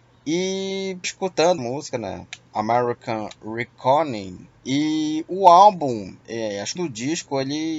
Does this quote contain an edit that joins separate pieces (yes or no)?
yes